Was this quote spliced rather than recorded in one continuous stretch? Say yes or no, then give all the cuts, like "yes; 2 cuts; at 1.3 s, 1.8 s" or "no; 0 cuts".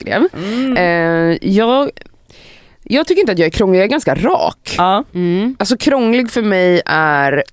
no; 0 cuts